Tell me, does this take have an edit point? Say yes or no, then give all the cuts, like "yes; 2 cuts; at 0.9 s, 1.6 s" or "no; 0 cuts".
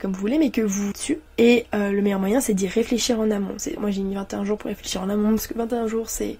yes; 3 cuts; at 0.9 s, 1.3 s, 3.8 s